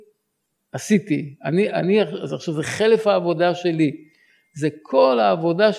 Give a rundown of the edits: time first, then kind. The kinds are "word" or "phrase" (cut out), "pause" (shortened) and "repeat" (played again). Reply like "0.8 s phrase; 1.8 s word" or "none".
none